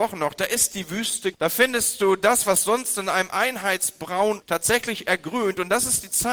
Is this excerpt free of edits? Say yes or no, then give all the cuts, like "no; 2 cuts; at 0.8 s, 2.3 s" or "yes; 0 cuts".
no; 2 cuts; at 1.3 s, 4.4 s